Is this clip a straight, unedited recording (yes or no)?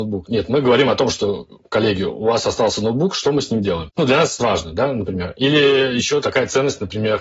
no